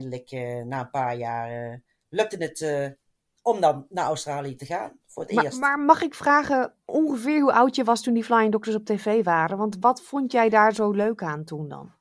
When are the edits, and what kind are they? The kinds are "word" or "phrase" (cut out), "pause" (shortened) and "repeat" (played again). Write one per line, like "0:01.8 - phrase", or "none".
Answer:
none

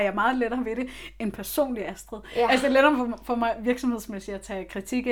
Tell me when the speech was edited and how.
none

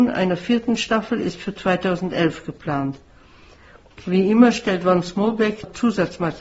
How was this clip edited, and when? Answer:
none

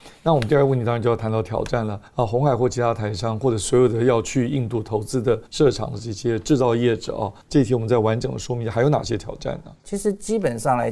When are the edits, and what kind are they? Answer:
0:02.1 - pause
0:05.5 - pause
0:07.4 - pause

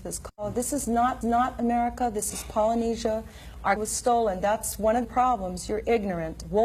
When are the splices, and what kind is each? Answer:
0:01.2 - repeat
0:03.8 - word
0:05.0 - word

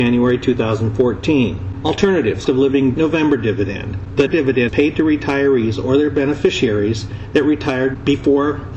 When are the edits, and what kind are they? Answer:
0:02.5 - word
0:02.9 - word
0:04.3 - word
0:04.7 - word

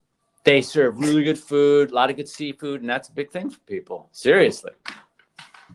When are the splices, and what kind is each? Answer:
none

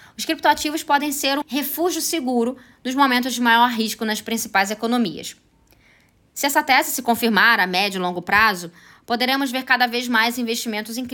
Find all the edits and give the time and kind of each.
0:01.4 - word

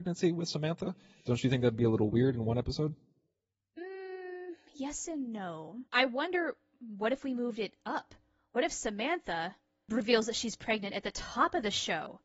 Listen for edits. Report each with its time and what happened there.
0:05.9 - pause

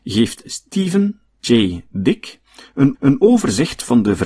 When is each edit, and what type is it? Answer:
0:02.9 - repeat

